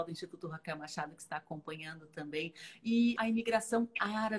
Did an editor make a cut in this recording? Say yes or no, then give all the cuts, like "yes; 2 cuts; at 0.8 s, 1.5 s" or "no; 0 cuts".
yes; 1 cut; at 3.2 s